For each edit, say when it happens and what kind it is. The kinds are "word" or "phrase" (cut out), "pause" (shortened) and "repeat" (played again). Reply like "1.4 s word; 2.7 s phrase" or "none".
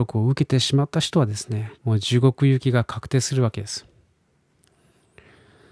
1.7 s pause

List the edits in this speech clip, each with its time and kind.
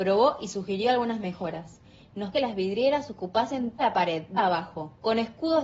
2.3 s word; 3.8 s word; 4.4 s word

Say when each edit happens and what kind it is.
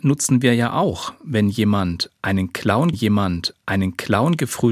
2.9 s repeat

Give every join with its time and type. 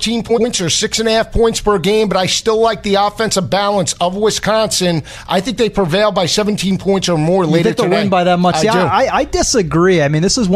none

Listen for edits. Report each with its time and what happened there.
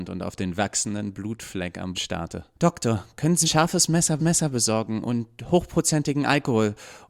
1.9 s word; 2.5 s pause; 3.4 s phrase; 4.2 s repeat

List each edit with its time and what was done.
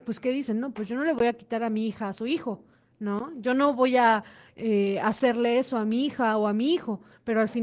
none

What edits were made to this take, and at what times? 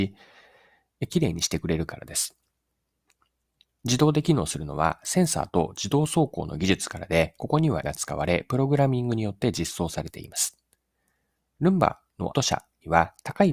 7.8 s word; 12.3 s word

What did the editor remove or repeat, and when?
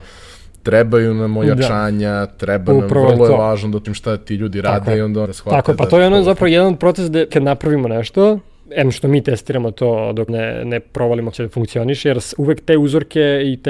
3.8 s phrase; 5.2 s word; 7.3 s word; 8.6 s word; 10.3 s word; 11.3 s word

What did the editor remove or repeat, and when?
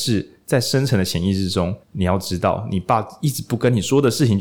1.8 s pause

